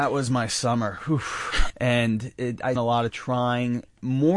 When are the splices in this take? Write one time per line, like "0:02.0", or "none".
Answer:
0:01.7
0:02.8
0:03.1